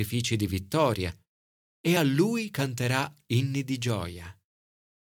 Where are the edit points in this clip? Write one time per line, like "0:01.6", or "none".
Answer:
none